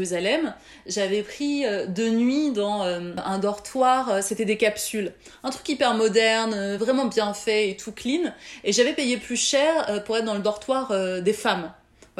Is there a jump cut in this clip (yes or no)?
no